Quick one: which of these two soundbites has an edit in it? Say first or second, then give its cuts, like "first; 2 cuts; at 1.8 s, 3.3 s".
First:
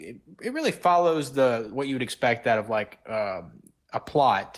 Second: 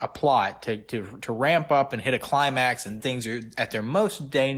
second; 1 cut; at 3.0 s